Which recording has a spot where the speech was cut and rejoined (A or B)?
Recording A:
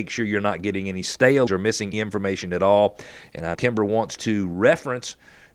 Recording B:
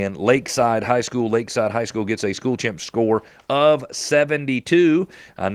A